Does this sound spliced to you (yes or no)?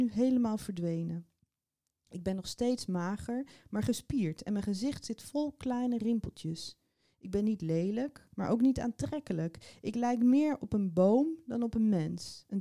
no